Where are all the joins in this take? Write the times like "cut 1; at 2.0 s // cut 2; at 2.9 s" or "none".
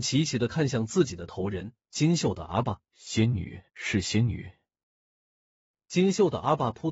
cut 1; at 2.9 s // cut 2; at 3.7 s